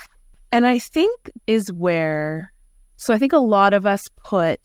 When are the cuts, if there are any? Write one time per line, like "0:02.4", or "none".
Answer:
0:01.4